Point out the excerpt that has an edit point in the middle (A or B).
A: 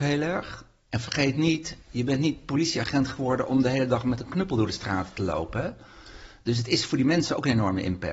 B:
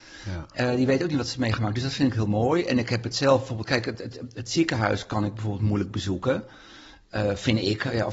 A